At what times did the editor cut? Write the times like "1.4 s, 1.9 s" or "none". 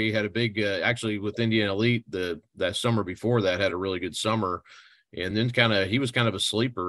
none